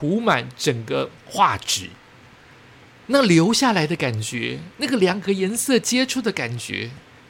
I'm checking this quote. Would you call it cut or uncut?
cut